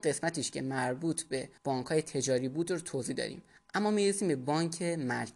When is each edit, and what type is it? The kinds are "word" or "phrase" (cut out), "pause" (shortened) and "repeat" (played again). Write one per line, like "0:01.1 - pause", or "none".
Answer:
0:01.6 - pause